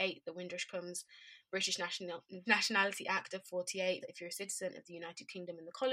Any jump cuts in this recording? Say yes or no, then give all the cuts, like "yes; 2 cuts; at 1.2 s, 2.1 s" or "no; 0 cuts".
yes; 2 cuts; at 2.5 s, 4.0 s